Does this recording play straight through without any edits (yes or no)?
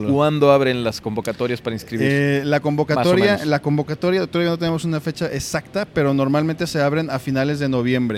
yes